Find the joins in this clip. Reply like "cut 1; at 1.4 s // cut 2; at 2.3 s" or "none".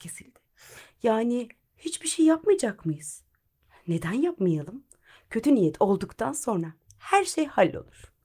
none